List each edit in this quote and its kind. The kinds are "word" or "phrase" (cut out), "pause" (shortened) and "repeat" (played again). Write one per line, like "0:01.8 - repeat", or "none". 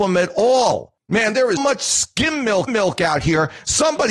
0:01.6 - word
0:02.7 - repeat